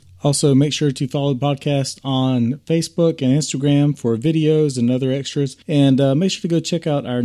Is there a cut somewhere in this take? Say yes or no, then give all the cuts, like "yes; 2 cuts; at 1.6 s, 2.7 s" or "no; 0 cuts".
yes; 1 cut; at 5.6 s